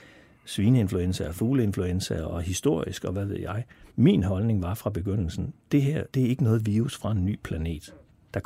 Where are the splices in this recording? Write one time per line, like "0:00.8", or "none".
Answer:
0:03.9
0:06.1